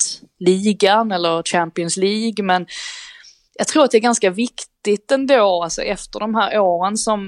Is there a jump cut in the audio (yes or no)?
no